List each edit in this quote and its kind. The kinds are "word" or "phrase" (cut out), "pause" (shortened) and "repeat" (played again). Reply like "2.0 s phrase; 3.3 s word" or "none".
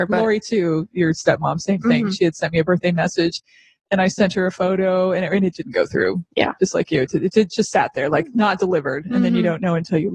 none